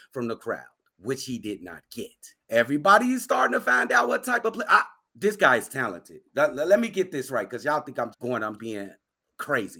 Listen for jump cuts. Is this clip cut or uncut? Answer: cut